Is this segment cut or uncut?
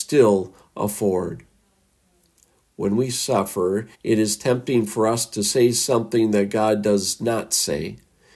cut